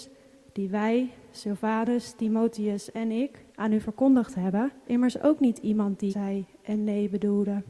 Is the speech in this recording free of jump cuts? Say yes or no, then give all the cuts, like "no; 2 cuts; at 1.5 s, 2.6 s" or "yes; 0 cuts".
no; 3 cuts; at 3.5 s, 4.9 s, 6.1 s